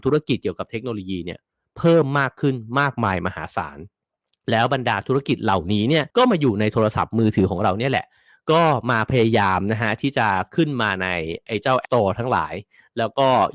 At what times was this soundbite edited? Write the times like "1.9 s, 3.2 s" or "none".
6.1 s, 11.8 s